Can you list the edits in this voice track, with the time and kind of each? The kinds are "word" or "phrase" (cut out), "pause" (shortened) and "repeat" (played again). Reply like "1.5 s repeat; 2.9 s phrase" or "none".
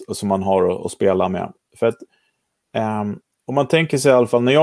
none